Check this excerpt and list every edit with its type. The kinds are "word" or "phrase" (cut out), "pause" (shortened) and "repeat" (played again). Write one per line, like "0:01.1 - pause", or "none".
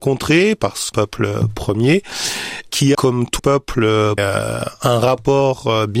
0:00.9 - phrase
0:02.9 - word
0:03.4 - word
0:04.2 - word